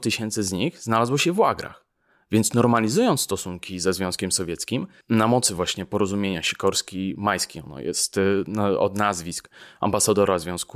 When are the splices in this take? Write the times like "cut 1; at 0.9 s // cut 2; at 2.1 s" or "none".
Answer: none

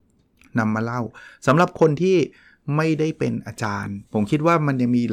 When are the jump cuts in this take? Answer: cut 1; at 4.1 s

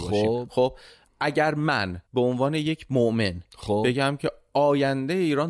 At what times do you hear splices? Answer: cut 1; at 2.1 s

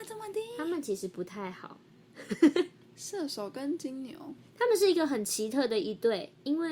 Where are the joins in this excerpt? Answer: none

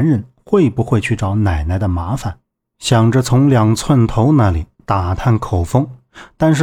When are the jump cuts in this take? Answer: none

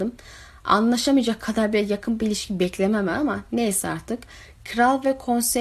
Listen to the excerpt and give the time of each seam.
none

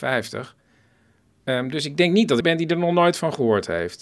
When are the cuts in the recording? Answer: cut 1; at 2.4 s

